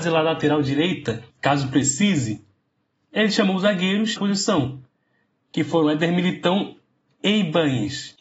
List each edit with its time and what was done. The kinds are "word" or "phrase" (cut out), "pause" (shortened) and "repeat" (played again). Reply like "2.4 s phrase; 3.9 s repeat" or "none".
1.3 s pause; 4.2 s phrase